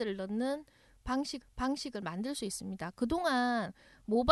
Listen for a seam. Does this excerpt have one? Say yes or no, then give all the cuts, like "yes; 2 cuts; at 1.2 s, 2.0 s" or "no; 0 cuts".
yes; 1 cut; at 1.4 s